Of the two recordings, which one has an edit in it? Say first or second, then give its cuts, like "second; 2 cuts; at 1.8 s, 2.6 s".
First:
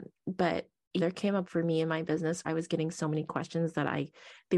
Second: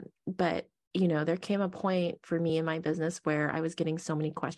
first; 3 cuts; at 1.0 s, 1.4 s, 2.4 s